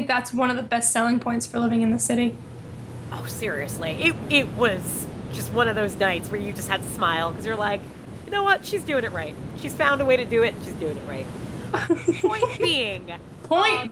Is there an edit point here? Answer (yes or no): no